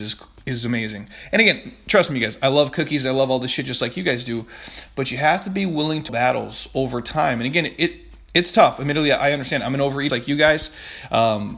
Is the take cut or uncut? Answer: cut